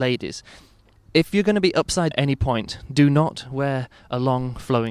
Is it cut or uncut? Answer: cut